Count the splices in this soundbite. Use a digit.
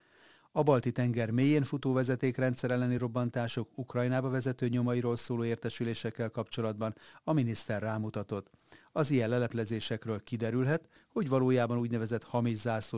0